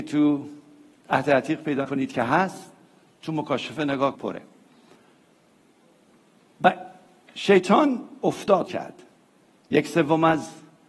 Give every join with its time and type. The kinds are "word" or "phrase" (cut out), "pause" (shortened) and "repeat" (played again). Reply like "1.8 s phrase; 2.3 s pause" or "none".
1.8 s word; 4.1 s word; 8.7 s word